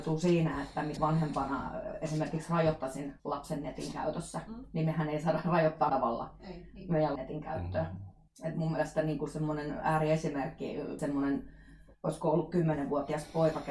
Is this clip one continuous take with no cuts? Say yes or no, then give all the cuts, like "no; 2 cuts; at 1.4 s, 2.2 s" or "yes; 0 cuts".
no; 7 cuts; at 1.0 s, 3.2 s, 5.9 s, 7.2 s, 8.3 s, 11.0 s, 11.9 s